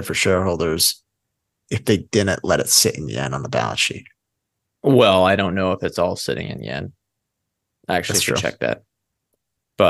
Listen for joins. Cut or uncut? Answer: uncut